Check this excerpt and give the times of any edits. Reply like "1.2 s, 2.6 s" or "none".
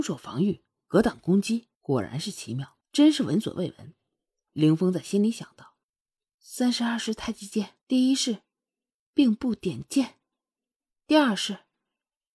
1.7 s, 2.8 s, 5.8 s, 7.8 s